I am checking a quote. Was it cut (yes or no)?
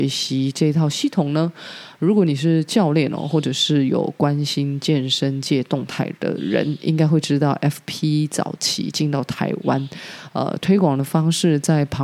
no